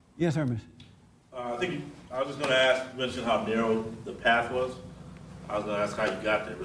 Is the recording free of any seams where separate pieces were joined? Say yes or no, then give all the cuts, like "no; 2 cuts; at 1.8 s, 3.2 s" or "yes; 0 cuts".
yes; 0 cuts